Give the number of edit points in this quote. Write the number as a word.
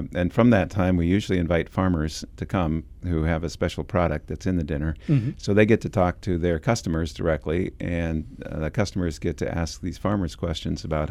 zero